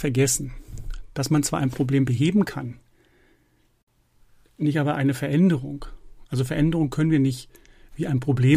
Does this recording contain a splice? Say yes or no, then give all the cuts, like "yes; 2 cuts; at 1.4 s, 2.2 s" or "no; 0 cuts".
no; 0 cuts